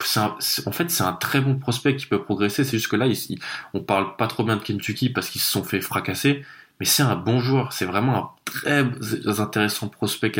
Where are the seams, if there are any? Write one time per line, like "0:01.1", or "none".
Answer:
none